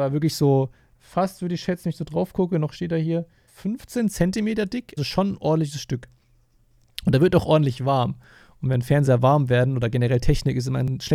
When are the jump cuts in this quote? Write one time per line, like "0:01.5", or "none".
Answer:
0:03.5
0:05.0